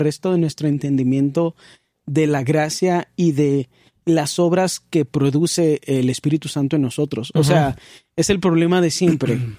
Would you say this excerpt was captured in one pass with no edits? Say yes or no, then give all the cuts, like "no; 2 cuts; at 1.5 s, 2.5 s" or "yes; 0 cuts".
yes; 0 cuts